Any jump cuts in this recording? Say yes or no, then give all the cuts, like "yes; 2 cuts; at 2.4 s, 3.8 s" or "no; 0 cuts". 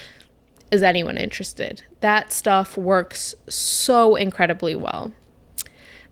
no; 0 cuts